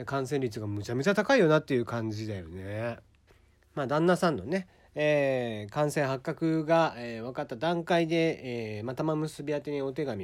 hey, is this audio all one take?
no; 1 cut; at 3.3 s

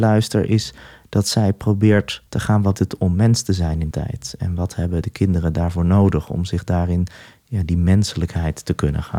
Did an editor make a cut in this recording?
yes; 3 cuts; at 2.3 s, 2.7 s, 3.9 s

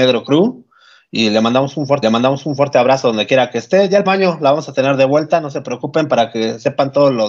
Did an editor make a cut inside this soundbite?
yes; 2 cuts; at 2.0 s, 4.1 s

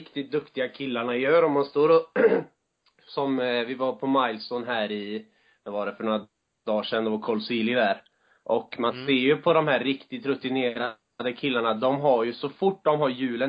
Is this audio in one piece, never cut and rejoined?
yes; 0 cuts

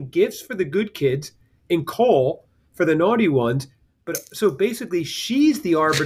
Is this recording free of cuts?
yes; 0 cuts

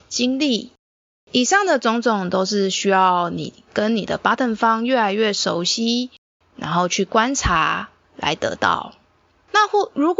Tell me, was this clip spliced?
no; 0 cuts

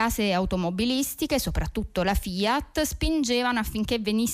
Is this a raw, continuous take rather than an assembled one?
yes; 0 cuts

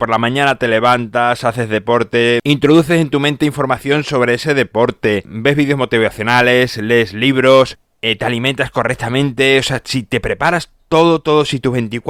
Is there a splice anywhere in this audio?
no; 0 cuts

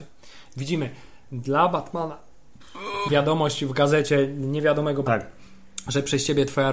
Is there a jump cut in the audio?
yes; 2 cuts; at 3.1 s, 5.1 s

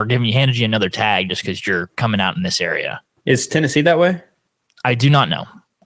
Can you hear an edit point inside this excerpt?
no; 0 cuts

